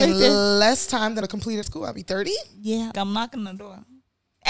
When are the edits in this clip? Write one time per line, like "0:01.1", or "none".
0:01.2
0:01.6
0:02.9

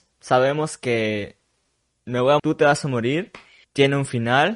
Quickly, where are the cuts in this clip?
0:02.4
0:03.6

